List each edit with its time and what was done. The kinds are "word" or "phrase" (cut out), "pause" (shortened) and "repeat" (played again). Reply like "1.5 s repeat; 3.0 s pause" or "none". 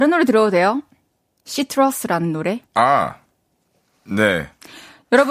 2.6 s pause

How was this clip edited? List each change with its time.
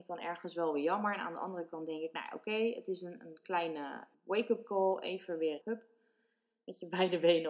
4.1 s word; 5.6 s word

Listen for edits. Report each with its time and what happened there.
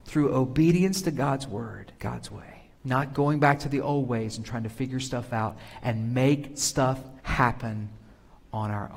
2.0 s pause; 2.8 s pause; 7.2 s pause

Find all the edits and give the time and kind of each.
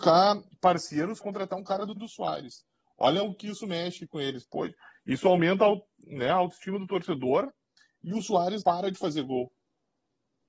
1.2 s word; 2.0 s word; 8.6 s word

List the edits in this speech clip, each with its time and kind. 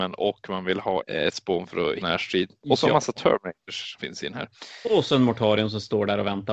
1.0 s word; 1.3 s word; 2.0 s word; 4.0 s word

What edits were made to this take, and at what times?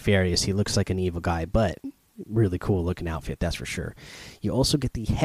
none

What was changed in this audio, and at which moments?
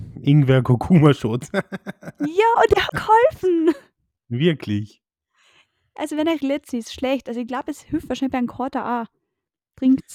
2.9 s word; 6.4 s phrase

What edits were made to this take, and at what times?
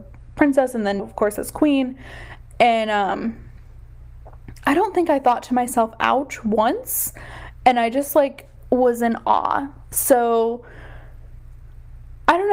1.0 s word

